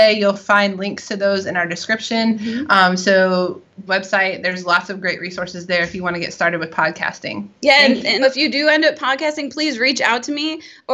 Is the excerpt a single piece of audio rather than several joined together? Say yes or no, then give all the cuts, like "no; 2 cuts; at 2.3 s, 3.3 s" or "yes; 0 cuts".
no; 3 cuts; at 3.9 s, 7.6 s, 8.2 s